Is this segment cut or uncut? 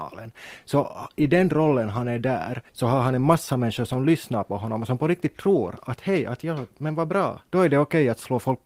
cut